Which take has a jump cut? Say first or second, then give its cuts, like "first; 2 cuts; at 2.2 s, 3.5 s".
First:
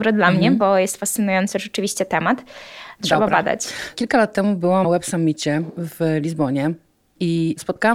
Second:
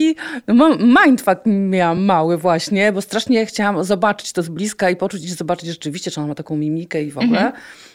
first; 1 cut; at 4.8 s